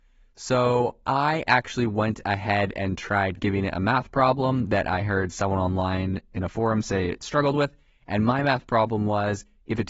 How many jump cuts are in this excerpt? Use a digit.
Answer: 0